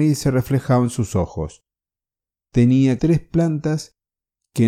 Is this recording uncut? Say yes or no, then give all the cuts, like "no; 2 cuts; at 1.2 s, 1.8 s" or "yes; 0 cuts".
no; 1 cut; at 3.0 s